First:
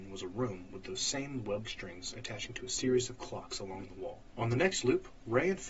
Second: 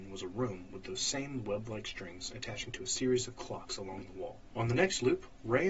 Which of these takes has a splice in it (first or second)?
first